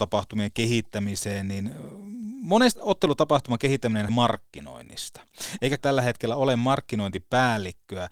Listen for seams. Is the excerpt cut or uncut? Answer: cut